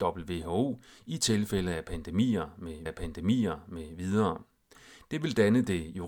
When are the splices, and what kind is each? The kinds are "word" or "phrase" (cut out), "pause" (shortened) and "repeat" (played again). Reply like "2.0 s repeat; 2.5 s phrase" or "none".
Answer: 2.9 s repeat